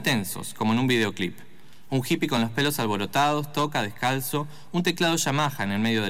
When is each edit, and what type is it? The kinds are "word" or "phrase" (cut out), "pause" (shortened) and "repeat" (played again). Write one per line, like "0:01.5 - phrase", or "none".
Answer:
none